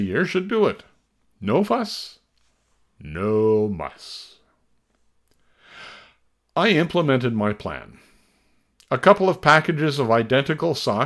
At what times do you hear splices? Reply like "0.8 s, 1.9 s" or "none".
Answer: none